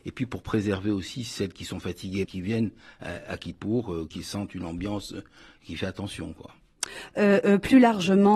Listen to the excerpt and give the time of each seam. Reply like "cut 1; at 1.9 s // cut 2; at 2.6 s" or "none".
cut 1; at 2.2 s // cut 2; at 4.1 s